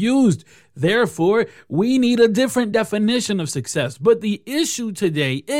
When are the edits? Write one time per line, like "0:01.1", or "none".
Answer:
none

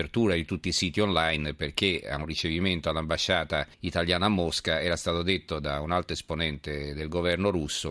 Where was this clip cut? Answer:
0:03.7

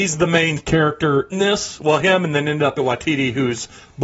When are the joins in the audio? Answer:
0:01.3
0:02.8

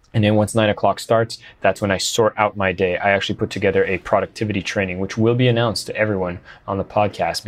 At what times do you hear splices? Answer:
none

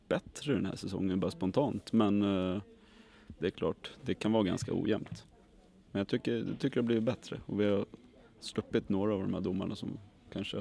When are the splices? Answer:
none

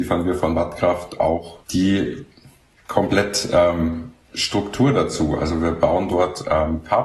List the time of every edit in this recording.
0:01.6
0:04.2

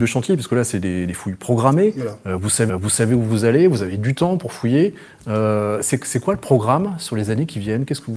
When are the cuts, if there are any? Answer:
0:02.7

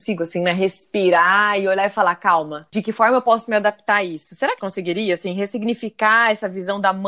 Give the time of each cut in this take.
0:04.6

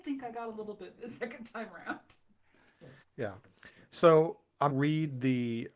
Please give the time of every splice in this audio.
0:01.0
0:03.0
0:04.7

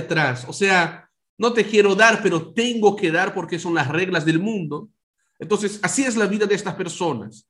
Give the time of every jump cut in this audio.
none

